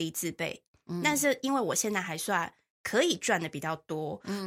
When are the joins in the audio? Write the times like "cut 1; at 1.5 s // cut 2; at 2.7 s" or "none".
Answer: none